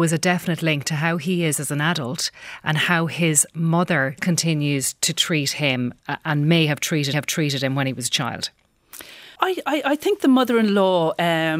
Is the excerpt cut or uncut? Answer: cut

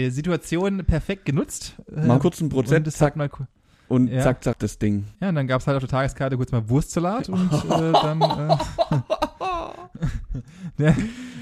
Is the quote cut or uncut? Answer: cut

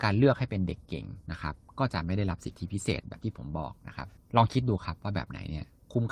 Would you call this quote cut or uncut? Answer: cut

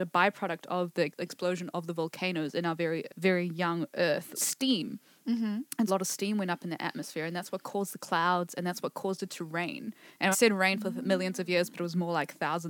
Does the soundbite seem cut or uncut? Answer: cut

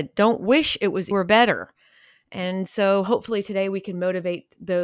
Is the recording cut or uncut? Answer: cut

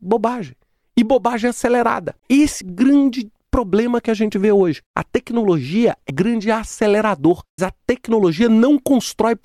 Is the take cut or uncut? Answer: cut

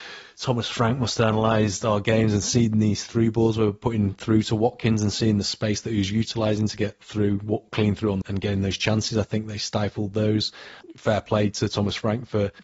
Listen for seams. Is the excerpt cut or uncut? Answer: cut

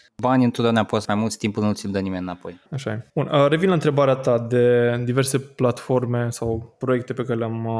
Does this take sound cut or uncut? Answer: cut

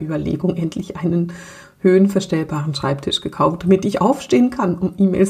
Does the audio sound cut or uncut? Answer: uncut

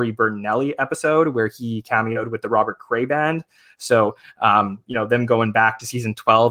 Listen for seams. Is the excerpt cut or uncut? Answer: uncut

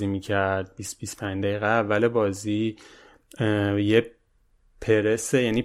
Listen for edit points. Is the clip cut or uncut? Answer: uncut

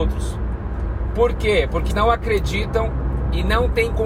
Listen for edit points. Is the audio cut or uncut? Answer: cut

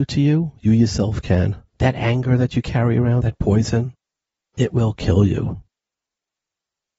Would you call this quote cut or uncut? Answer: cut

